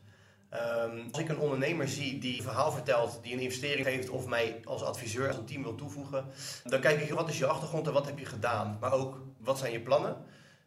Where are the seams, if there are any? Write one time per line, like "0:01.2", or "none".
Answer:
0:01.1
0:02.4
0:03.8
0:05.3
0:06.7
0:07.1
0:09.4